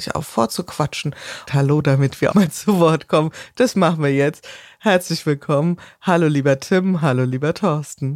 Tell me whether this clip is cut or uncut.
cut